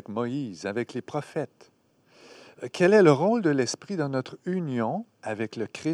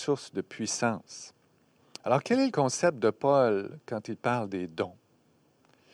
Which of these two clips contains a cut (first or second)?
second